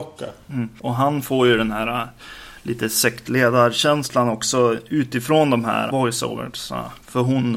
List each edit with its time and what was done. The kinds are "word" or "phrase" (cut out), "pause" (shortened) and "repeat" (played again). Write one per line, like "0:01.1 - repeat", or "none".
0:05.9 - word